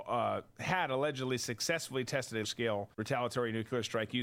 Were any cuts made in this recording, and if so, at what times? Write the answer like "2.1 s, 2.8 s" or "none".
2.4 s, 2.9 s